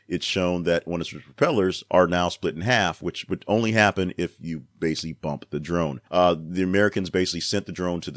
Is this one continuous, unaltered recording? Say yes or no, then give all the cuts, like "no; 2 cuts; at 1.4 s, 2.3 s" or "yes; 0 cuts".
no; 1 cut; at 6.1 s